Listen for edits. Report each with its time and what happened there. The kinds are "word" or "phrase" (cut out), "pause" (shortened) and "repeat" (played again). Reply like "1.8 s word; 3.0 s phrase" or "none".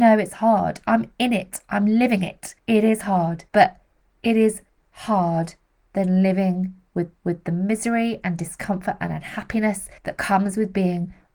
2.6 s pause; 3.5 s pause; 4.8 s word; 7.1 s repeat; 10.0 s pause